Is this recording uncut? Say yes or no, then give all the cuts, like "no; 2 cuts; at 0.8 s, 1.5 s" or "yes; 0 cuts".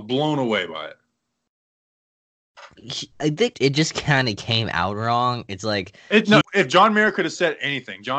no; 3 cuts; at 3.1 s, 3.5 s, 6.4 s